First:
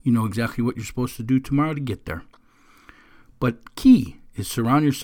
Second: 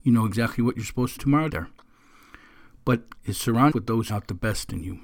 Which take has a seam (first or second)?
second